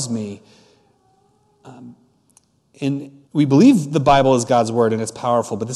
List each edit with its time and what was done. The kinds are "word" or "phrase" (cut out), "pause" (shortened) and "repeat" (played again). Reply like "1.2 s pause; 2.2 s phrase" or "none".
3.3 s pause